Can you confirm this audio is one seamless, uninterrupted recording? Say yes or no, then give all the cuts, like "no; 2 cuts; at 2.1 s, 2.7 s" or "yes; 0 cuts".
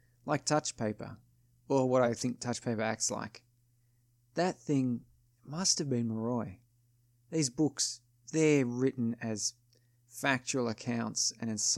yes; 0 cuts